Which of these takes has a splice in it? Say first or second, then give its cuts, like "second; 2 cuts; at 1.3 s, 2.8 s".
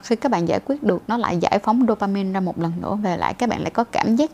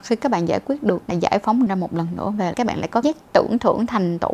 second; 4 cuts; at 1.1 s, 1.7 s, 2.5 s, 3.0 s